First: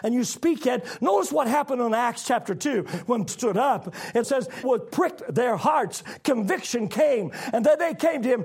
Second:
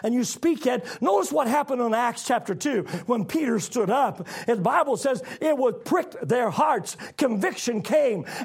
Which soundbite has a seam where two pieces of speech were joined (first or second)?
first